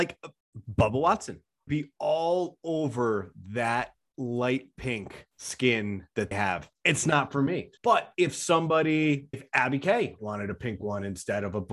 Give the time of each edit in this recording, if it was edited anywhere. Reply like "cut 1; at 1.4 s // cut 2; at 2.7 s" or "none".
cut 1; at 1.7 s // cut 2; at 6.3 s // cut 3; at 6.7 s // cut 4; at 7.8 s // cut 5; at 9.3 s // cut 6; at 10.2 s